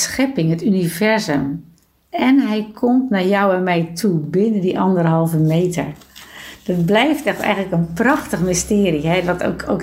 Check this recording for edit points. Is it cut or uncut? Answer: uncut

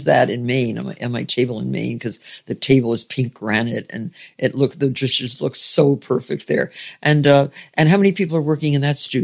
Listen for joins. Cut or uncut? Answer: uncut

